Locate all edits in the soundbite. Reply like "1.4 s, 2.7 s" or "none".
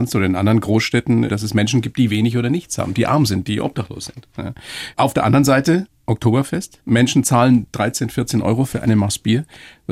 none